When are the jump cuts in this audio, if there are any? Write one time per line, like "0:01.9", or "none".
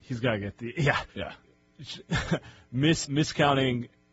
0:01.1
0:03.0